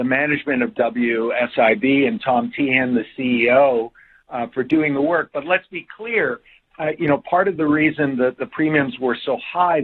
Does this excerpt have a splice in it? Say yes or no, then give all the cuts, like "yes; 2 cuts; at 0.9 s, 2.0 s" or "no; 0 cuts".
no; 0 cuts